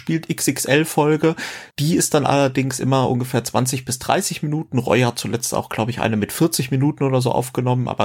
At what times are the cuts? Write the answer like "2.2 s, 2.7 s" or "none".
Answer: 1.7 s